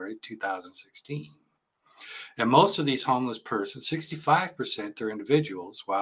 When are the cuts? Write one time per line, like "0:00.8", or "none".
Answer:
none